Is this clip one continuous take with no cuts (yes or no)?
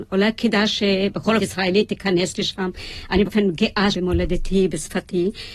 no